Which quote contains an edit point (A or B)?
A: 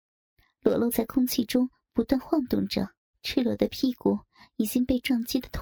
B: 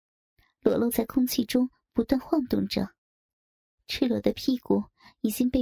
A